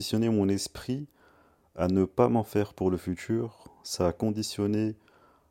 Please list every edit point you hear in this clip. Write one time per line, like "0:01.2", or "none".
none